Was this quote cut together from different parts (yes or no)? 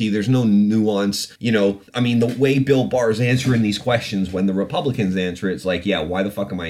yes